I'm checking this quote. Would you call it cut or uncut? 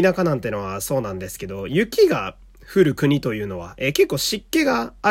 uncut